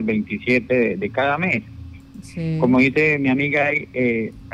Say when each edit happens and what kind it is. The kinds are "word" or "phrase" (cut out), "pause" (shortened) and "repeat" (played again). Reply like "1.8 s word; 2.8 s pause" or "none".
none